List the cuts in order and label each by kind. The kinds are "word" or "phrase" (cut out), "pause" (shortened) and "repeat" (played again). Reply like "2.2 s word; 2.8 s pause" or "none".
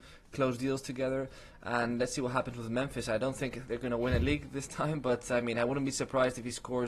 none